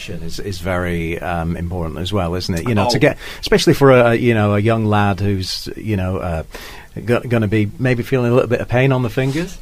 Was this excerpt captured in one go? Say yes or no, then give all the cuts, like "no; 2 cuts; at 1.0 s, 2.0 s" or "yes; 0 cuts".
yes; 0 cuts